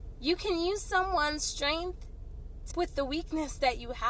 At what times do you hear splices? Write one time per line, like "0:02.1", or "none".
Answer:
0:02.7